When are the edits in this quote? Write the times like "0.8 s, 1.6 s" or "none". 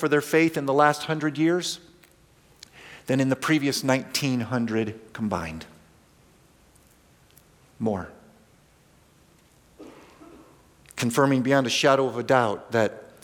none